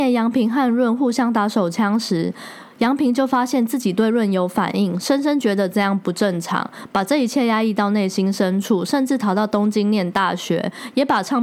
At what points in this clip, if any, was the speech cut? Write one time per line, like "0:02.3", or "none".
none